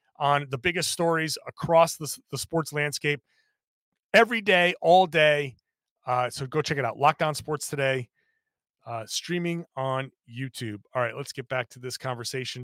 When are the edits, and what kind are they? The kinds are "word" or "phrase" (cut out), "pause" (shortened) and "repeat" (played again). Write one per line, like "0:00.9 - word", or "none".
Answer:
none